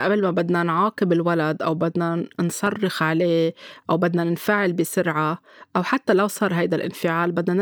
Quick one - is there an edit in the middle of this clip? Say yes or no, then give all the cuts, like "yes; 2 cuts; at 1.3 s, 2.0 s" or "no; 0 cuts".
no; 0 cuts